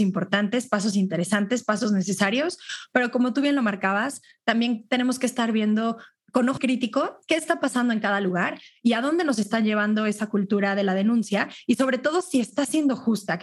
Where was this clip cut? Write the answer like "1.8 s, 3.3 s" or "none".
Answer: 6.6 s